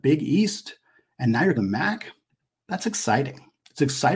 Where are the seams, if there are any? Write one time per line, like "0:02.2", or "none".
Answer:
0:01.6